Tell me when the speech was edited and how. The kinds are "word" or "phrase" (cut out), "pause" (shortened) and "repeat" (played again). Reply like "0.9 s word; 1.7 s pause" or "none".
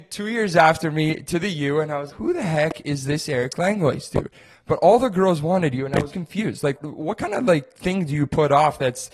2.1 s word; 6.1 s word; 6.8 s word